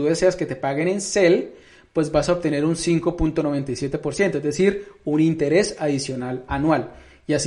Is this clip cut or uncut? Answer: uncut